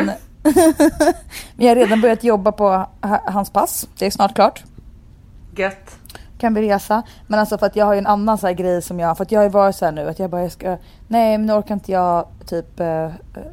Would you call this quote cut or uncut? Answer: cut